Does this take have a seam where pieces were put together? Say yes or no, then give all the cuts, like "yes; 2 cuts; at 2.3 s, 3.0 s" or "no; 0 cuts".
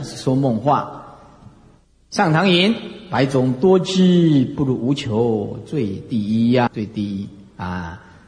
yes; 1 cut; at 6.7 s